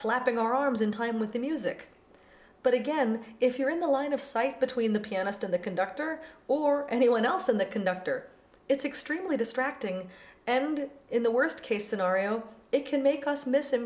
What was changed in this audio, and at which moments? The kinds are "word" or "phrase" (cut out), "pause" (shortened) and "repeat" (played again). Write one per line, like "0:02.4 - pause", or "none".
none